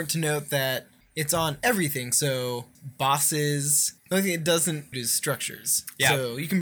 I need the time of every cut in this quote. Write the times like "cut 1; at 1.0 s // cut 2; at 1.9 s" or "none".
cut 1; at 1.0 s // cut 2; at 2.7 s // cut 3; at 4.0 s // cut 4; at 4.9 s